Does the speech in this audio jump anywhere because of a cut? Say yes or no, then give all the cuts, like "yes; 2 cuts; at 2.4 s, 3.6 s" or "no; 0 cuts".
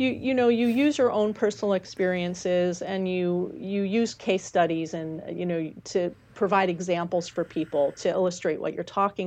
no; 0 cuts